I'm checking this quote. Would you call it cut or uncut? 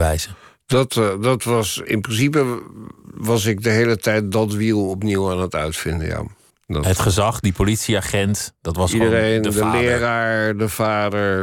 cut